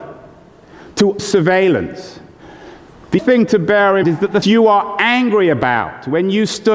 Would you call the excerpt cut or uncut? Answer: cut